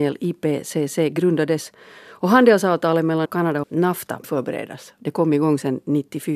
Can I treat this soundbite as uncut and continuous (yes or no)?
no